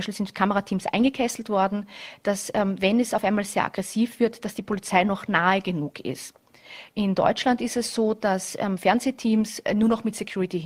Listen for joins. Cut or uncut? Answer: uncut